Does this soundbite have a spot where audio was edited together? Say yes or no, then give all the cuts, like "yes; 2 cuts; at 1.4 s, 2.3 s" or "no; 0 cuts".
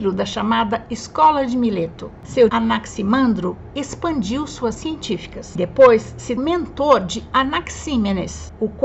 yes; 4 cuts; at 2.5 s, 4.8 s, 5.6 s, 6.4 s